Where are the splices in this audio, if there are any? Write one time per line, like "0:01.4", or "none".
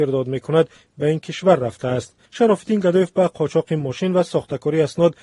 0:02.3